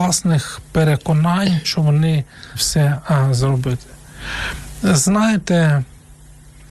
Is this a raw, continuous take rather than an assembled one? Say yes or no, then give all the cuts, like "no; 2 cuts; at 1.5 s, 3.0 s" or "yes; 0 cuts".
no; 2 cuts; at 1.6 s, 2.5 s